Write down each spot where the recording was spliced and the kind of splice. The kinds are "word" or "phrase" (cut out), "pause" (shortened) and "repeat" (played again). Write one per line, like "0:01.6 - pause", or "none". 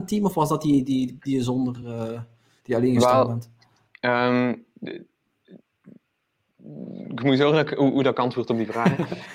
none